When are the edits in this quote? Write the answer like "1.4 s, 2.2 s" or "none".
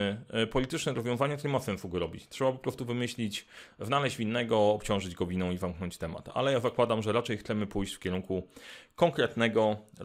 none